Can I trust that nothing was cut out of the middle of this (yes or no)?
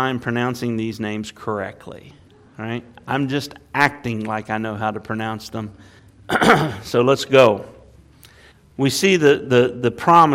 yes